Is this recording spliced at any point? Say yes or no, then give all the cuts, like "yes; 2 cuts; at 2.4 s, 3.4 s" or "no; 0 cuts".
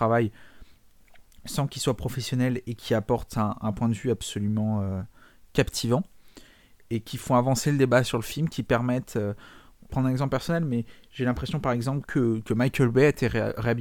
no; 0 cuts